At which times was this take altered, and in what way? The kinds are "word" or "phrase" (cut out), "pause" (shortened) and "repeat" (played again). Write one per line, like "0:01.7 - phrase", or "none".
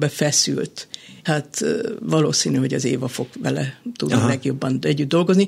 0:01.2 - word